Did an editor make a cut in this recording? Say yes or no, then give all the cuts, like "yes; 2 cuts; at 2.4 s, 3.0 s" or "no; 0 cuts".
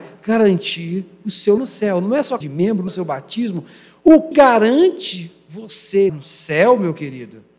yes; 5 cuts; at 1.6 s, 2.4 s, 2.9 s, 4.3 s, 6.1 s